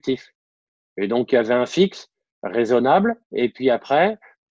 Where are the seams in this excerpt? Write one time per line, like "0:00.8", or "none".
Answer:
0:03.2